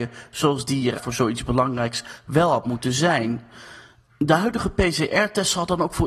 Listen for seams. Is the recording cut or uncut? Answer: cut